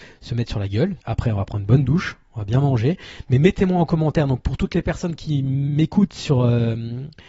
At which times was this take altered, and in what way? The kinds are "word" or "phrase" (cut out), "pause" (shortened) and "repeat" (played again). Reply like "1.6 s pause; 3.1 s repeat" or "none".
1.0 s pause